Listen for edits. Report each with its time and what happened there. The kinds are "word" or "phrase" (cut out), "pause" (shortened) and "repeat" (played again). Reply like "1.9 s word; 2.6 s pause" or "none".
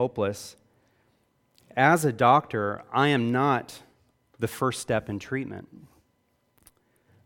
none